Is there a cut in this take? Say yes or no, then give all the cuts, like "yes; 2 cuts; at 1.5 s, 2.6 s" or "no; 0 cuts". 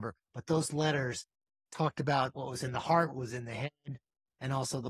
no; 0 cuts